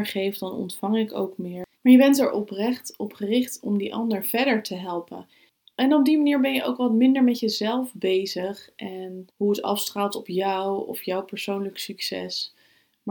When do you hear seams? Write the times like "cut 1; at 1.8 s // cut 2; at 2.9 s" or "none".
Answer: cut 1; at 1.8 s // cut 2; at 9.3 s